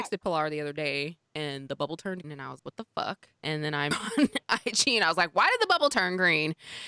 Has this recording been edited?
yes; 5 cuts; at 1.2 s, 2.2 s, 2.6 s, 3.3 s, 3.9 s

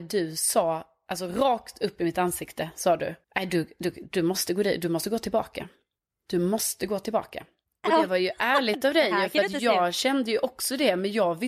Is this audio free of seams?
no; 1 cut; at 3.2 s

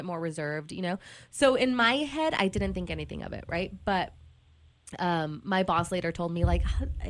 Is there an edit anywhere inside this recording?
no; 0 cuts

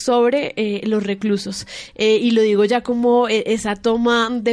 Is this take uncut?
yes; 0 cuts

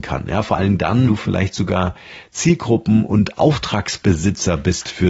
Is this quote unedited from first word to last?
no; 1 cut; at 1.1 s

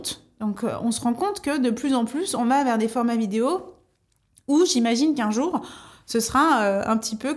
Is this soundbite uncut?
yes; 0 cuts

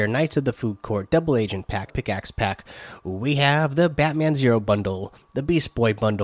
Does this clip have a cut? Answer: yes; 1 cut; at 1.9 s

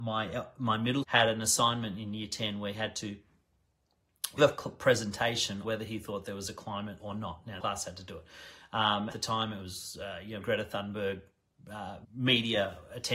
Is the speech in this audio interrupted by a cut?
yes; 9 cuts; at 1.0 s, 2.7 s, 4.4 s, 5.6 s, 7.0 s, 7.6 s, 9.1 s, 10.4 s, 12.0 s

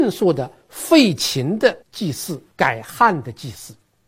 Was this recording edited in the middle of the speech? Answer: yes; 2 cuts; at 1.8 s, 2.5 s

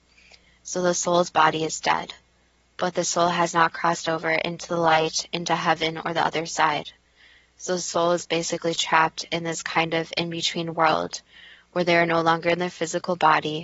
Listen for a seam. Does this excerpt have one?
no; 0 cuts

